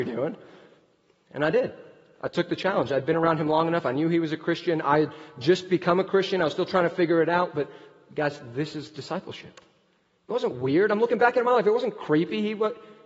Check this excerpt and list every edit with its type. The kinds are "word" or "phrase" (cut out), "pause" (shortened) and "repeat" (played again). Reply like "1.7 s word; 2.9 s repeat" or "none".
none